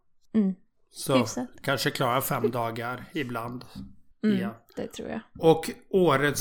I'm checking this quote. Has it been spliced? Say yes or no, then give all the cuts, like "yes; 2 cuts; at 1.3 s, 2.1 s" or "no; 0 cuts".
yes; 1 cut; at 4.1 s